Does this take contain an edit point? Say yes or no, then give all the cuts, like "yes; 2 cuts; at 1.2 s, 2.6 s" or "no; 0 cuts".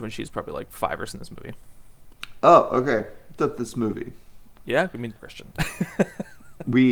yes; 3 cuts; at 1.1 s, 3.4 s, 5.2 s